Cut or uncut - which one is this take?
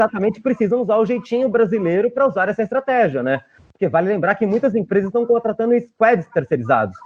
uncut